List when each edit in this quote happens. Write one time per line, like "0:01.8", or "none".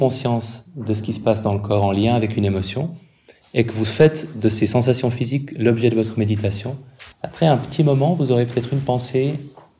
0:07.1